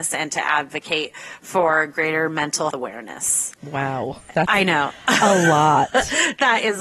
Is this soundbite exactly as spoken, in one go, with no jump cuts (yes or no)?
no